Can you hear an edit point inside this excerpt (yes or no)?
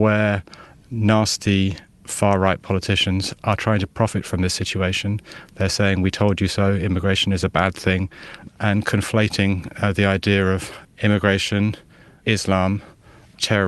no